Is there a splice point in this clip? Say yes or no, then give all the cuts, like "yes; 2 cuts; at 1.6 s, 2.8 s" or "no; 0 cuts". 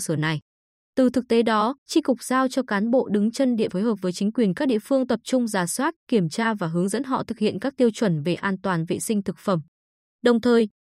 yes; 3 cuts; at 1.8 s, 3.7 s, 6.0 s